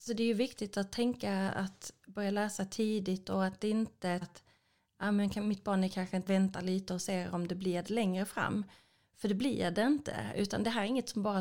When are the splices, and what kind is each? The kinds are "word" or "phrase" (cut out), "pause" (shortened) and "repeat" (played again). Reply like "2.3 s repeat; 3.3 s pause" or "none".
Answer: 4.2 s word; 6.3 s phrase; 7.9 s word